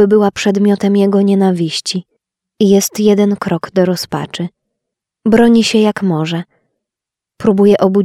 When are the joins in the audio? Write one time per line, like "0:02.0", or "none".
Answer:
0:02.2
0:04.9